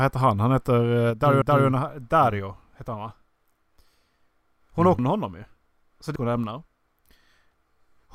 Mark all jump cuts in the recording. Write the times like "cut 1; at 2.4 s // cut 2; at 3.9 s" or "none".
cut 1; at 1.4 s // cut 2; at 5.0 s // cut 3; at 6.2 s